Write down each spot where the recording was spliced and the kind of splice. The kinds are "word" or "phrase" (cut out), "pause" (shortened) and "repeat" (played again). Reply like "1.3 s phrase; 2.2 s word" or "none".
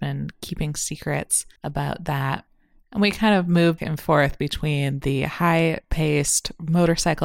1.6 s pause; 3.8 s word